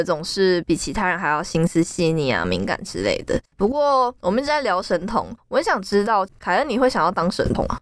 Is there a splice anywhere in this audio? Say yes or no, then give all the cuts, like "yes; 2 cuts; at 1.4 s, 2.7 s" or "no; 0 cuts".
yes; 1 cut; at 3.5 s